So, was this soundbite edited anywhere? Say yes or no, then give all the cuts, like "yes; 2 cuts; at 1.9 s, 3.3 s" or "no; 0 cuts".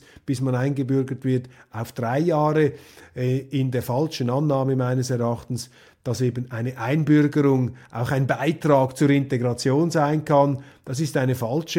no; 0 cuts